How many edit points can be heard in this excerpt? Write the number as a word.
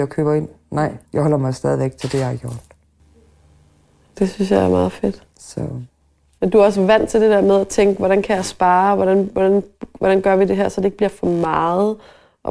two